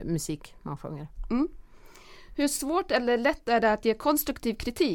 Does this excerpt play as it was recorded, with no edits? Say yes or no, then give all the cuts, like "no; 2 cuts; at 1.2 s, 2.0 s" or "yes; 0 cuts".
yes; 0 cuts